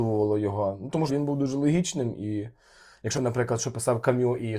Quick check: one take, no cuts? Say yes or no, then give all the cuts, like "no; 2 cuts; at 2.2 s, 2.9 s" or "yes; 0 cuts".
no; 2 cuts; at 1.1 s, 3.1 s